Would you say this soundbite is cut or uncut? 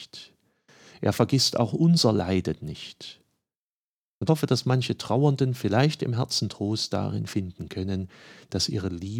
cut